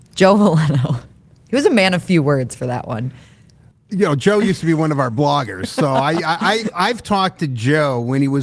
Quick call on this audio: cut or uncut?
uncut